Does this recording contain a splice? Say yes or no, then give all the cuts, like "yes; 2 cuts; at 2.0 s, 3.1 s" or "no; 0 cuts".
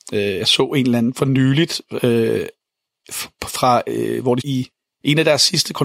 yes; 1 cut; at 4.4 s